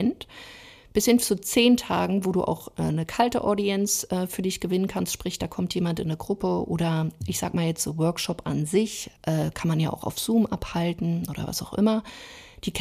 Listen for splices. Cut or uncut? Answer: cut